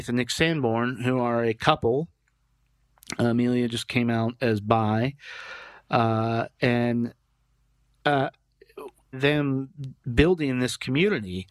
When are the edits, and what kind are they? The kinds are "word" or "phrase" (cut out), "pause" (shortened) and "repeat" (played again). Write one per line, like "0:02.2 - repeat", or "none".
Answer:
0:09.1 - phrase